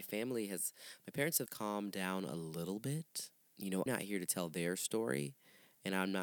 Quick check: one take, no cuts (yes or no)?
no